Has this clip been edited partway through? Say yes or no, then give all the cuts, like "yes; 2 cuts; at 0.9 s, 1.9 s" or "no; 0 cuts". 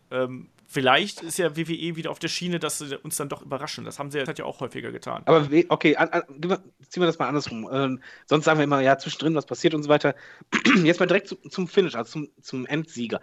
yes; 2 cuts; at 4.3 s, 5.5 s